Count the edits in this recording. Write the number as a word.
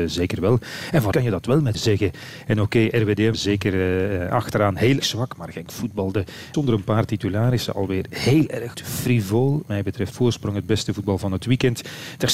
eight